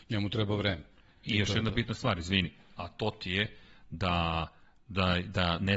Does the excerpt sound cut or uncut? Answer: cut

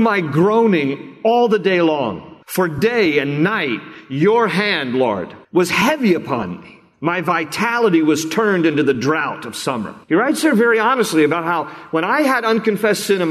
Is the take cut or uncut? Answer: cut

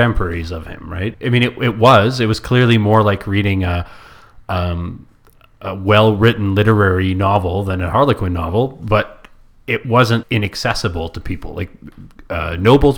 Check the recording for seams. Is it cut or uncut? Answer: cut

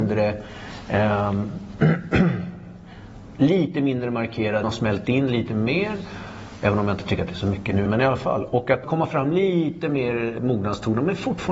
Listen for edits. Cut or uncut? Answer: cut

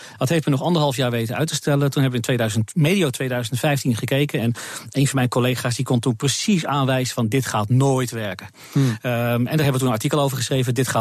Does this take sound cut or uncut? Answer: uncut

